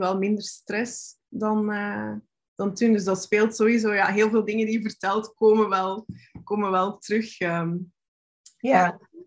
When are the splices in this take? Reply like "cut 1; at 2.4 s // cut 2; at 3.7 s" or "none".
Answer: none